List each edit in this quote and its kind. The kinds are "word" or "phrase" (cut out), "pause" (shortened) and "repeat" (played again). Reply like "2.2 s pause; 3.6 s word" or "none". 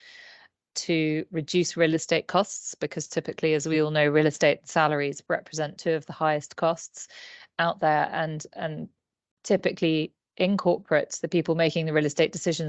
none

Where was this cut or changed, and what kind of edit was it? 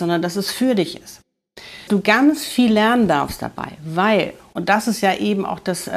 1.9 s word

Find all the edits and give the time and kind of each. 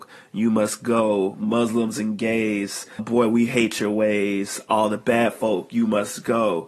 3.0 s word

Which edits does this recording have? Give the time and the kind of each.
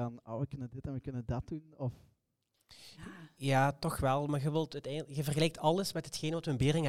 none

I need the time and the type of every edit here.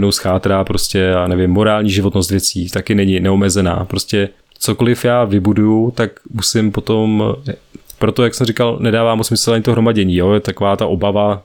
none

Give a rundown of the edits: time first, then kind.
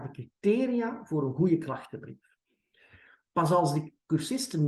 none

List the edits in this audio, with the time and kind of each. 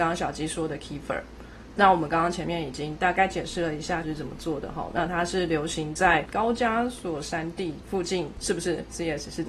4.0 s word

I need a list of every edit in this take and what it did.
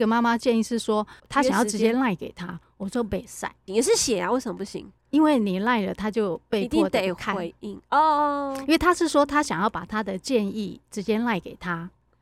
1.2 s word; 3.7 s phrase; 5.0 s pause

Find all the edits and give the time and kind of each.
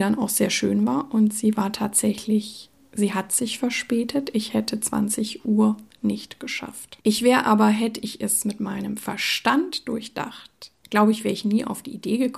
7.0 s pause; 10.8 s pause

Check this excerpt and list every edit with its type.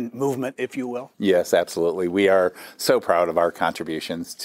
1.1 s pause

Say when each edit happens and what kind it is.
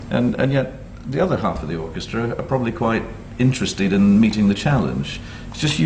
none

